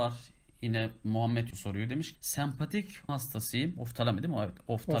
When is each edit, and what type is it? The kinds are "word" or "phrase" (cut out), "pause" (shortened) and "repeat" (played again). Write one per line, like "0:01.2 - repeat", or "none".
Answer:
0:01.5 - word
0:02.1 - word
0:03.1 - word